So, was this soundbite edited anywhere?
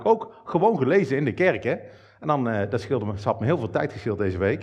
no; 0 cuts

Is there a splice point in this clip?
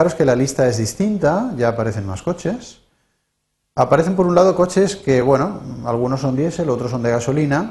no; 0 cuts

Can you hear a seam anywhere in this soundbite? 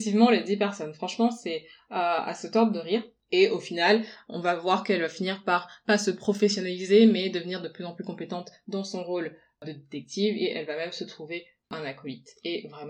no; 0 cuts

